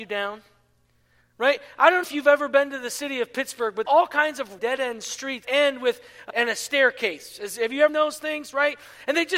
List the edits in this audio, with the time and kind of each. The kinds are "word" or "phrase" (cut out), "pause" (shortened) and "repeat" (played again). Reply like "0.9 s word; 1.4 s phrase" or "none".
2.0 s word; 3.8 s word; 4.6 s word; 5.4 s word; 6.3 s word; 7.9 s word